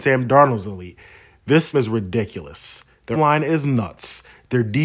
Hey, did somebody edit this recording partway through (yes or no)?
yes